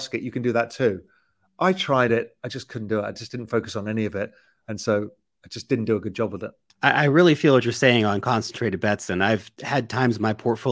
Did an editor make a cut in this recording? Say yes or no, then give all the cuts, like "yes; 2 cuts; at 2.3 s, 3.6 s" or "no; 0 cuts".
no; 0 cuts